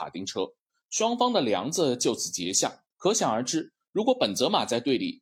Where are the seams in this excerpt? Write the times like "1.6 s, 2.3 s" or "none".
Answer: 2.9 s